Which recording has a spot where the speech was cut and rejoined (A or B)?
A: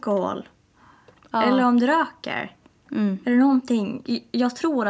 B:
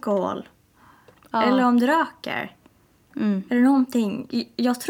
A